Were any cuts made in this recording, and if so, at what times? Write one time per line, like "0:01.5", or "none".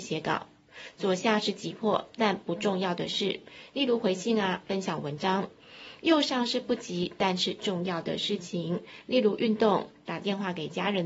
none